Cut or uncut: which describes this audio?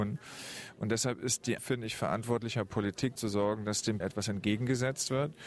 cut